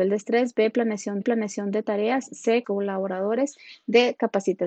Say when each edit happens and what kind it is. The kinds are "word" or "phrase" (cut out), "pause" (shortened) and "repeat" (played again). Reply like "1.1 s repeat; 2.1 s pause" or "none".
1.2 s repeat; 2.6 s phrase